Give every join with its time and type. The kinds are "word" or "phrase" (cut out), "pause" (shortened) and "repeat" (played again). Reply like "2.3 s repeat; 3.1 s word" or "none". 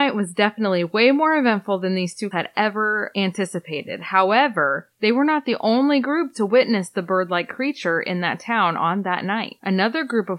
2.3 s word; 4.9 s pause